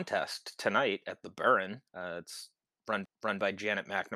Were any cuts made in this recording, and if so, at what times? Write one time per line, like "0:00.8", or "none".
0:01.9
0:03.0